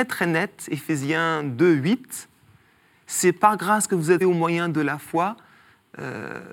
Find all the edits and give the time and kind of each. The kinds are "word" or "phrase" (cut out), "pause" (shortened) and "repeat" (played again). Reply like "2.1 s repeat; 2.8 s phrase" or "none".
4.2 s word

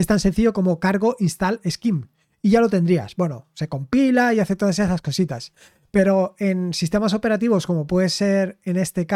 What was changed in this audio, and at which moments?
none

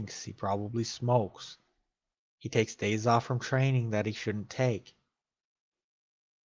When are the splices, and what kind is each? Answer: none

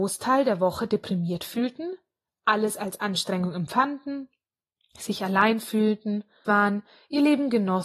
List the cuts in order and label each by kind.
6.4 s word

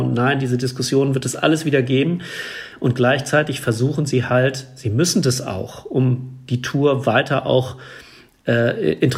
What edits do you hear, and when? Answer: none

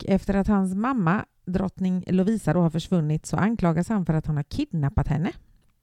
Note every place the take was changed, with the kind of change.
none

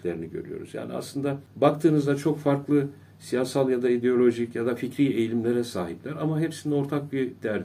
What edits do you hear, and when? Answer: none

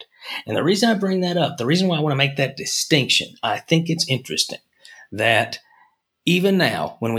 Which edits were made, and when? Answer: none

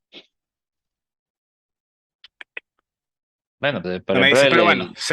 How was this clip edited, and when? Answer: 3.8 s word

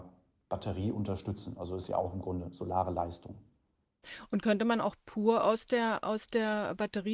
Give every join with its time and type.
none

